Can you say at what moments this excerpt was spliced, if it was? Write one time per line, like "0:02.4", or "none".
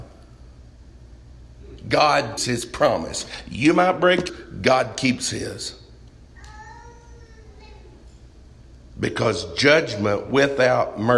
0:02.4
0:04.3

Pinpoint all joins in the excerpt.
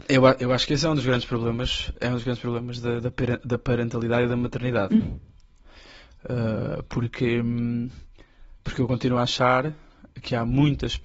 0:01.9

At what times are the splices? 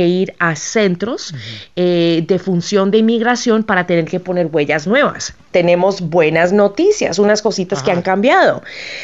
none

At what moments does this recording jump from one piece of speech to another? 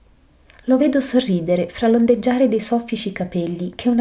none

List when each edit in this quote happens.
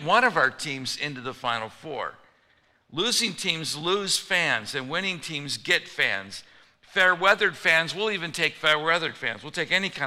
none

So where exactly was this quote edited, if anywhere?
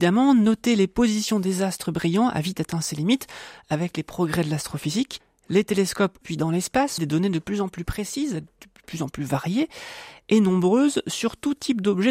0:06.2
0:07.0

